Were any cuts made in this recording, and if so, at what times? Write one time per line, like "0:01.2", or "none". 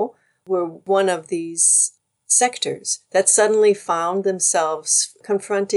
none